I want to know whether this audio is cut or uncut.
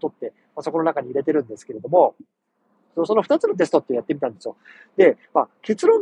uncut